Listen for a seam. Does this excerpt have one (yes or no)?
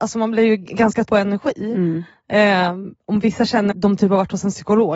yes